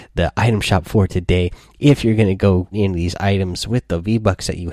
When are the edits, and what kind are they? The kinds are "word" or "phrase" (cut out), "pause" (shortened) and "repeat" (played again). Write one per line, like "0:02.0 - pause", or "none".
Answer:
0:02.7 - word